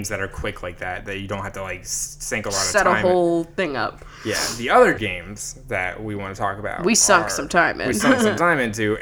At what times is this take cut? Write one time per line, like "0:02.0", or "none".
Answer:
0:05.0